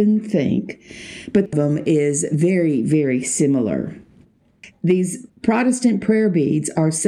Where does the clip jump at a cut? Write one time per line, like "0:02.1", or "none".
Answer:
0:01.5